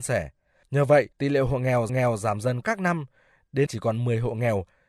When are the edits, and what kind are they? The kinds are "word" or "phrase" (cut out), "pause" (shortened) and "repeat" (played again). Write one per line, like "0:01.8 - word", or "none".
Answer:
0:01.1 - pause
0:01.9 - repeat
0:02.6 - word
0:03.7 - word